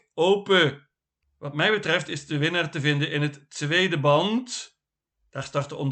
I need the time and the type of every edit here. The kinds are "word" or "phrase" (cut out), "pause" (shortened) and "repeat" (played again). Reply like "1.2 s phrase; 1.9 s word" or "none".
none